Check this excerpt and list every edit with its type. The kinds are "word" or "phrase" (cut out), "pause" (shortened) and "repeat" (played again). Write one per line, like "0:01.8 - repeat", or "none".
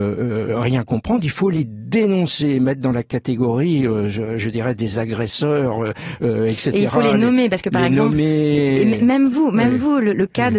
none